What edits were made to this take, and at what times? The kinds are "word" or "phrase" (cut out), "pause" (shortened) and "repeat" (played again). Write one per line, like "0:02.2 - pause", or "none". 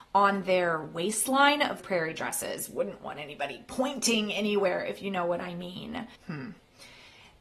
0:01.8 - word
0:06.2 - pause